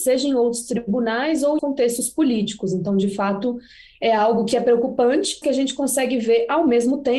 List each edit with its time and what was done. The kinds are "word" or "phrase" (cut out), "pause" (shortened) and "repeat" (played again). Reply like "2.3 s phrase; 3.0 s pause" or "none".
1.6 s word; 5.4 s word